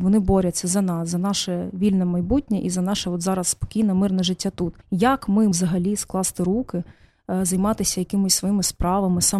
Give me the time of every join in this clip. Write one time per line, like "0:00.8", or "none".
0:04.8
0:05.5